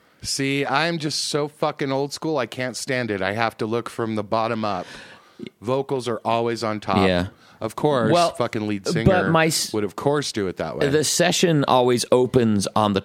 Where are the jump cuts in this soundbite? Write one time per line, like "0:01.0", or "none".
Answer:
none